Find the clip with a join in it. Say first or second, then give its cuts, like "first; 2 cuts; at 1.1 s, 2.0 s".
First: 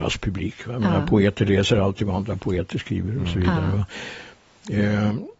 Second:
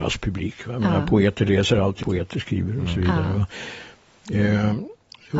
second; 1 cut; at 2.0 s